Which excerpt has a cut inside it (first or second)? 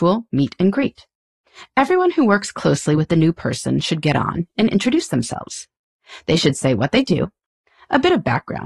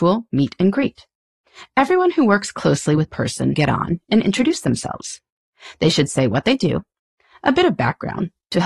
second